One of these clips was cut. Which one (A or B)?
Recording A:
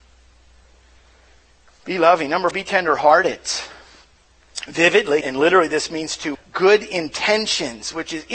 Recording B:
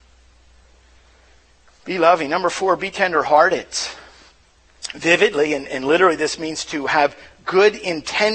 A